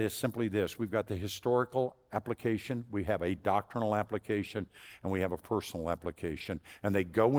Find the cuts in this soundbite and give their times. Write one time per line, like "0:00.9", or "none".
none